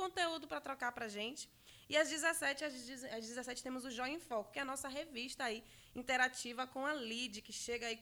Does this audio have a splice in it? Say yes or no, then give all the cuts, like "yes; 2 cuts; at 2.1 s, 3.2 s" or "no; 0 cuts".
no; 0 cuts